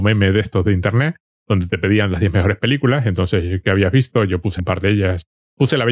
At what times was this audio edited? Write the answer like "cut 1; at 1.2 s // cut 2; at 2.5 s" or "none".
cut 1; at 4.6 s